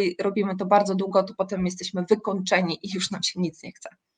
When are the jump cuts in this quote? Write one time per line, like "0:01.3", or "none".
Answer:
none